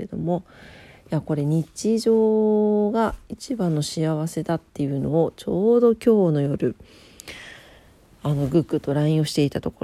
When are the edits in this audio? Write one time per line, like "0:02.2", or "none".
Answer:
none